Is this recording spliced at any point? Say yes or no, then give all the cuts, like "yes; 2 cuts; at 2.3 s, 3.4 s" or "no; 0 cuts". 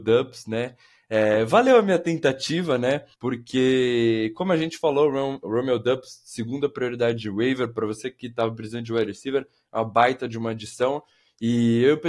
yes; 1 cut; at 3.1 s